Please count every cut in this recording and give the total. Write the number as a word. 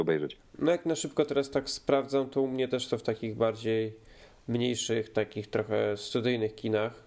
zero